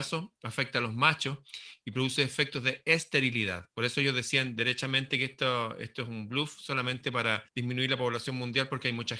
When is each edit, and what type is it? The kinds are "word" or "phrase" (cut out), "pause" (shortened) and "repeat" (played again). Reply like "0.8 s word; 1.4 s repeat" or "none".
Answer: 7.5 s pause